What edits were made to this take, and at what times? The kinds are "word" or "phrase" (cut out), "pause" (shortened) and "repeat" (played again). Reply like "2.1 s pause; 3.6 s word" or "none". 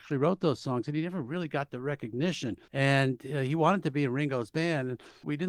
2.6 s pause